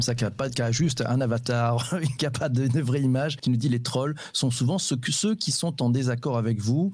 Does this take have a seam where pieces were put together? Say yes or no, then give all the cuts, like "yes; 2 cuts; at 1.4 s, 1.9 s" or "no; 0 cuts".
no; 0 cuts